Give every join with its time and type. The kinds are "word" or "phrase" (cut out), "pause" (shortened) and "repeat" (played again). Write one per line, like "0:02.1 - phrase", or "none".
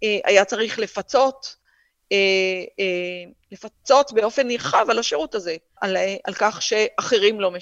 0:05.8 - word